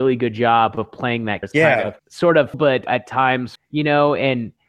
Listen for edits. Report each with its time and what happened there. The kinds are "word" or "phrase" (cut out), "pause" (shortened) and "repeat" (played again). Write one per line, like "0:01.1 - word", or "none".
0:01.4 - word
0:02.0 - pause
0:02.5 - word
0:02.9 - word
0:03.6 - word